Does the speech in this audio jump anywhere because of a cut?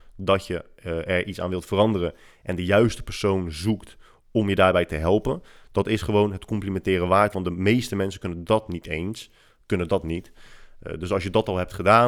no; 0 cuts

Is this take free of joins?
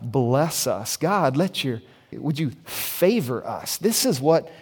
no; 1 cut; at 2.1 s

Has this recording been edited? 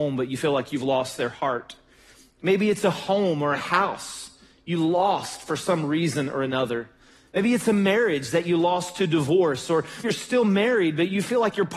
yes; 1 cut; at 10.0 s

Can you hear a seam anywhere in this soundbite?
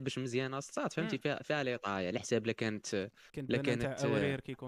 yes; 1 cut; at 3.3 s

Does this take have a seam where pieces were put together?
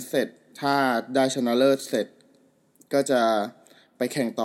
no; 0 cuts

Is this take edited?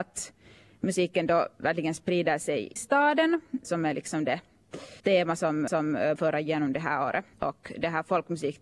yes; 7 cuts; at 1.5 s, 2.8 s, 3.6 s, 5.0 s, 5.7 s, 6.2 s, 7.3 s

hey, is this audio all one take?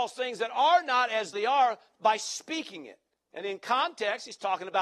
no; 1 cut; at 1.3 s

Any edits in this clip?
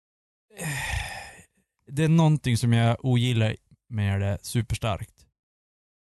no; 0 cuts

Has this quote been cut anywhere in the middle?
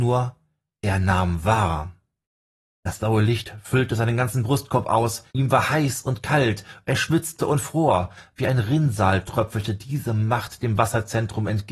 yes; 2 cuts; at 2.3 s, 5.3 s

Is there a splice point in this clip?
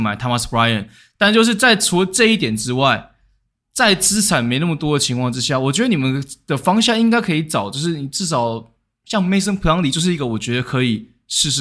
no; 0 cuts

